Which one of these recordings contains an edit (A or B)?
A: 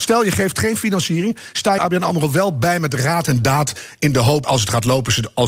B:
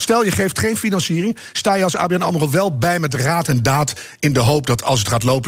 A